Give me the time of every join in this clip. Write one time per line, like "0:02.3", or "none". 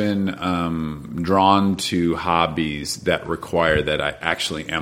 none

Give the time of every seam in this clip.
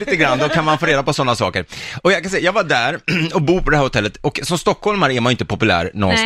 none

